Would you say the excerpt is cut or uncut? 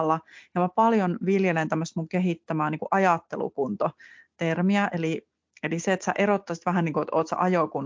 uncut